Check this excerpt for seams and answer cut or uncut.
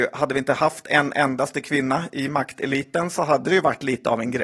uncut